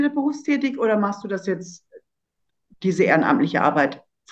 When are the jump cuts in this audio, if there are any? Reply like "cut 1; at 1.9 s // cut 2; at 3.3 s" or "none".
none